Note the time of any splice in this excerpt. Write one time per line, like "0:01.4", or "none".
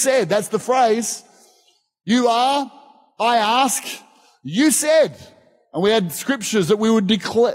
none